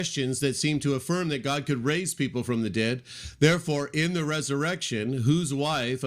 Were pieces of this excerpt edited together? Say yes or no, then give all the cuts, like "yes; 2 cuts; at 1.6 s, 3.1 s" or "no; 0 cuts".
no; 0 cuts